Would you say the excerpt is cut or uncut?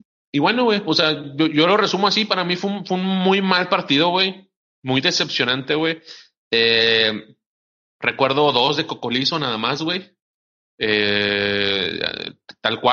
uncut